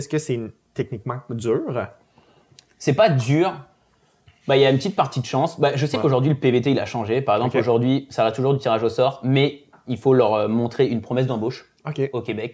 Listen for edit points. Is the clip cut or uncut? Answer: uncut